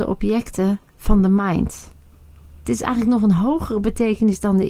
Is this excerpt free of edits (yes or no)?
yes